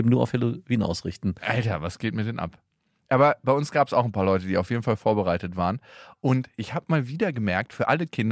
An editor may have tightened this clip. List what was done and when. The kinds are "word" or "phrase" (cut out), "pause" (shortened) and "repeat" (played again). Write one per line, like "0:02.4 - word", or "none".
none